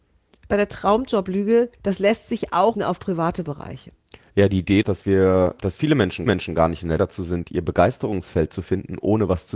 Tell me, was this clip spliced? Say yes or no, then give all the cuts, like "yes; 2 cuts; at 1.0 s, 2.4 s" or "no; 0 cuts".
yes; 6 cuts; at 1.7 s, 2.7 s, 4.8 s, 5.6 s, 6.3 s, 7.0 s